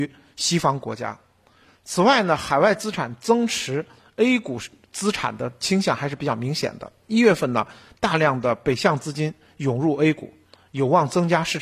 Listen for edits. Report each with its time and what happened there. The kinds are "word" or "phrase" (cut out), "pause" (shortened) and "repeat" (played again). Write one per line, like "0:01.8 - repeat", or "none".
none

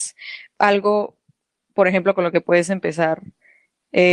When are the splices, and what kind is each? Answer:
none

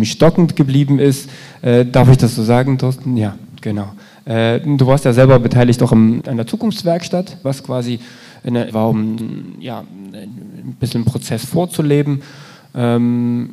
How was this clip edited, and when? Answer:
0:06.2 - word
0:07.4 - word
0:08.7 - word
0:09.2 - word

